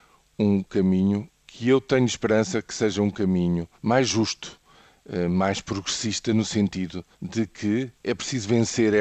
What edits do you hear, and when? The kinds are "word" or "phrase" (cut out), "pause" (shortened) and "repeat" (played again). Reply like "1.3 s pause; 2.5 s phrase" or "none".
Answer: 3.8 s pause; 7.1 s pause; 8.0 s pause